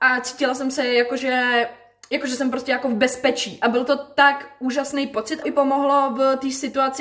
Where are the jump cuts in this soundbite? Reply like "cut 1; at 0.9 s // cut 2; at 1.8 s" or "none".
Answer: cut 1; at 5.4 s